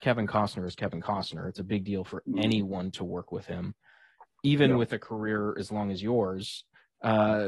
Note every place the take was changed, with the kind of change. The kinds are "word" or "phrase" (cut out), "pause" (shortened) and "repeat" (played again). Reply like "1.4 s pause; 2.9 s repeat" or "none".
none